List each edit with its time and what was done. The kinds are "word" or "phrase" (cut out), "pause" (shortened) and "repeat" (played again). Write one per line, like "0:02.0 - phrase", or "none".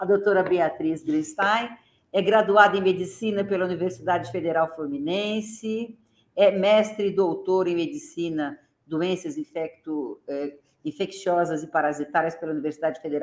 none